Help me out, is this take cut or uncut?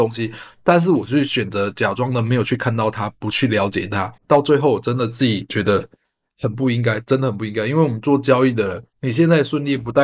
cut